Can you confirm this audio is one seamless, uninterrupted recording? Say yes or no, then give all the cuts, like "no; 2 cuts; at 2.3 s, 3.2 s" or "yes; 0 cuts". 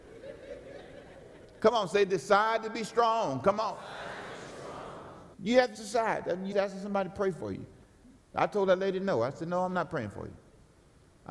no; 4 cuts; at 5.3 s, 5.7 s, 6.5 s, 8.0 s